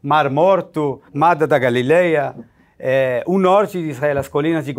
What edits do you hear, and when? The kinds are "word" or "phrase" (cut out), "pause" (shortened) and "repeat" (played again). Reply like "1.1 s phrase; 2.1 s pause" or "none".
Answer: 1.1 s pause